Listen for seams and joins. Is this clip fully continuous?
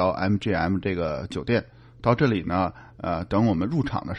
yes; 0 cuts

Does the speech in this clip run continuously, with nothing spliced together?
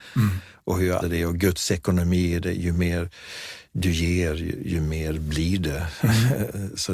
no; 1 cut; at 1.0 s

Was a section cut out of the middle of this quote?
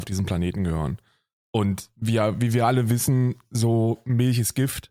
no; 0 cuts

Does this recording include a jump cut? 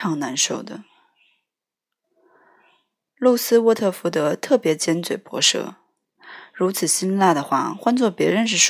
no; 0 cuts

